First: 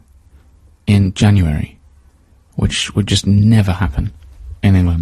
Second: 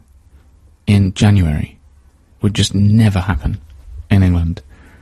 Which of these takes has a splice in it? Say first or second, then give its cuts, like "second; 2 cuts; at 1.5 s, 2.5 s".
second; 1 cut; at 2.4 s